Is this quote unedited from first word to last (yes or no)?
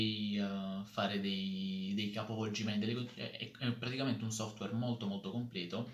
yes